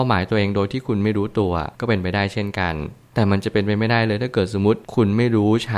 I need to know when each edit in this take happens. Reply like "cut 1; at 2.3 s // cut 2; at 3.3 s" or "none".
cut 1; at 1.7 s // cut 2; at 4.8 s

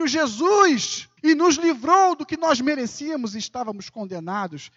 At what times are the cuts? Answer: cut 1; at 1.2 s

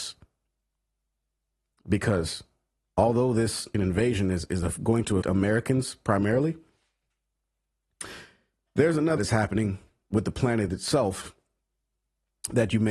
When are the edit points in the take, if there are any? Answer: cut 1; at 3.7 s // cut 2; at 5.2 s // cut 3; at 9.2 s

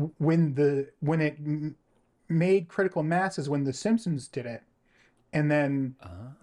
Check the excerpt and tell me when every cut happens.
none

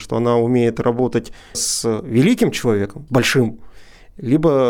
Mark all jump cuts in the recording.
cut 1; at 1.5 s // cut 2; at 3.1 s

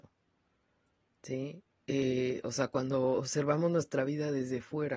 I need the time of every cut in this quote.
none

